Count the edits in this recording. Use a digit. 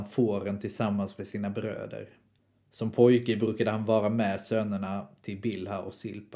1